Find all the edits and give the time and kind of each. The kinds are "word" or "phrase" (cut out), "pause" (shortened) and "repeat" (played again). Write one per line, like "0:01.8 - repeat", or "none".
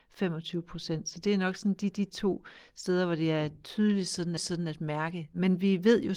0:01.9 - repeat
0:04.4 - repeat